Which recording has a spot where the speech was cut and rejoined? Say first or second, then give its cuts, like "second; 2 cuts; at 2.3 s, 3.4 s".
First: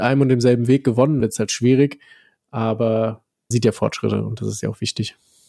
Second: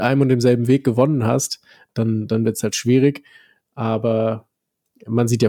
first; 2 cuts; at 1.2 s, 3.5 s